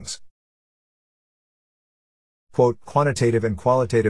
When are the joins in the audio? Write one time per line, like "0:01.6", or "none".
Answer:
none